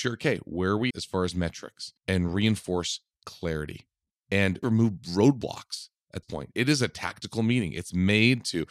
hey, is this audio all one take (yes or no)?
no